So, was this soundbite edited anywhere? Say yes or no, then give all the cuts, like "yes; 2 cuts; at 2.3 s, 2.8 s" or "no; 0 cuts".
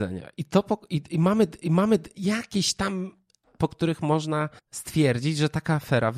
yes; 3 cuts; at 1.6 s, 3.4 s, 4.6 s